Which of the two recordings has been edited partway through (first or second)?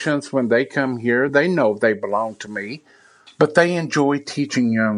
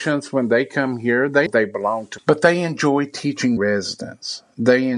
second